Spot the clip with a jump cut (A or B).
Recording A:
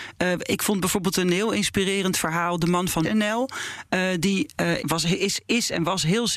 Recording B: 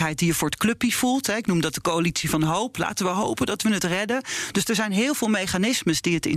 A